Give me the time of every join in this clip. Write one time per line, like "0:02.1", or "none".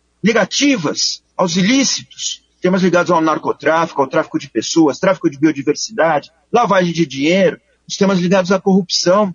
0:01.3